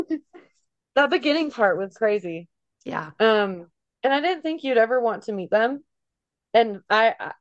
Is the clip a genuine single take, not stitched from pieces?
yes; 0 cuts

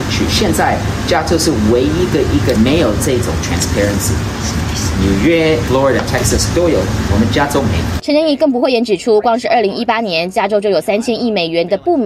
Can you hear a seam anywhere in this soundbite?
yes; 3 cuts; at 2.6 s, 5.7 s, 7.1 s

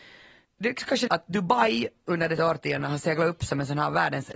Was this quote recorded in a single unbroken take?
no; 2 cuts; at 1.1 s, 2.4 s

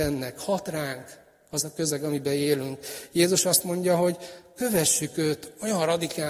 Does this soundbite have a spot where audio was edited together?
no; 0 cuts

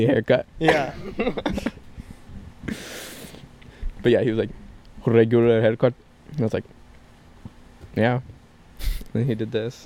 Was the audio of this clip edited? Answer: no; 0 cuts

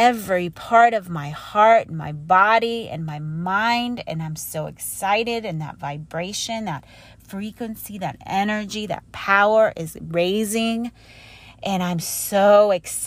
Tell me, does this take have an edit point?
no; 0 cuts

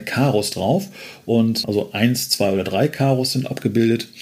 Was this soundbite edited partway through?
no; 0 cuts

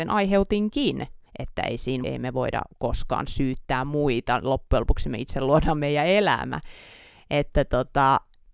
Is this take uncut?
no; 3 cuts; at 1.3 s, 2.0 s, 2.7 s

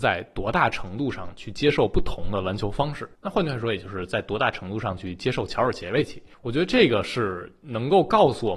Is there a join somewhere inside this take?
yes; 2 cuts; at 3.1 s, 6.3 s

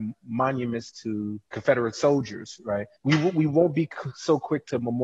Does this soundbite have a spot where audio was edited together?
yes; 2 cuts; at 1.5 s, 3.0 s

